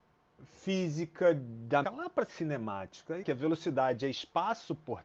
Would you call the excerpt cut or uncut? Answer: cut